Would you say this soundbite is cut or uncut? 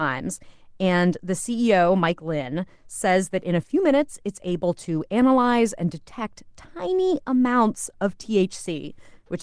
uncut